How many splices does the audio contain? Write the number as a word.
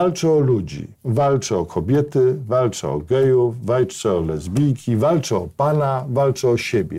one